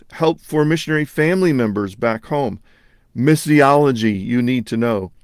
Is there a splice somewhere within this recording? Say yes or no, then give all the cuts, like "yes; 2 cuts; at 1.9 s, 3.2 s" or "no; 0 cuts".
no; 0 cuts